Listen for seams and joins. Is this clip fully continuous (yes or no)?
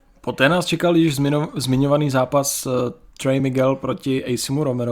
yes